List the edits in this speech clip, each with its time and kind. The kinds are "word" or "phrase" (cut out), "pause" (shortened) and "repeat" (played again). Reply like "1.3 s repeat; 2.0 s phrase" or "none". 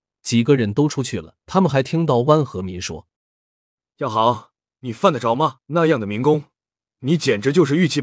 1.4 s pause; 3.2 s pause; 5.6 s pause